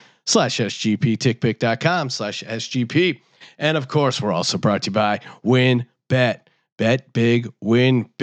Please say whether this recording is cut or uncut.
uncut